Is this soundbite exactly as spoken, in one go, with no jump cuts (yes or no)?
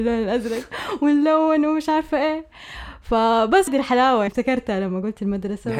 no